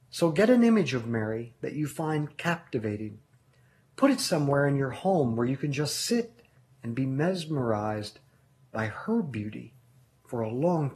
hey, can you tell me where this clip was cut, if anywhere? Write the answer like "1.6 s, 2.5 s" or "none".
none